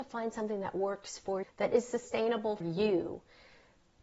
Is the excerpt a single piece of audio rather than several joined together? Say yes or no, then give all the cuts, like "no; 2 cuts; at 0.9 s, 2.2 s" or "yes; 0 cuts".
no; 2 cuts; at 1.4 s, 2.6 s